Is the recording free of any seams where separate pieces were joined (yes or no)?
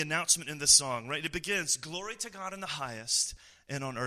yes